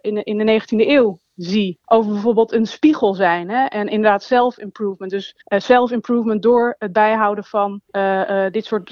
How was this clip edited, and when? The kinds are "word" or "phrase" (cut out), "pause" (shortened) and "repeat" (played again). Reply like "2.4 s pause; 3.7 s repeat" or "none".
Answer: 1.8 s pause; 5.4 s pause; 7.9 s pause